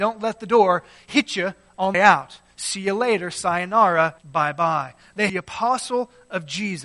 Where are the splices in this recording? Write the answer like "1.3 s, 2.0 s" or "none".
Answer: 1.9 s, 4.2 s, 5.3 s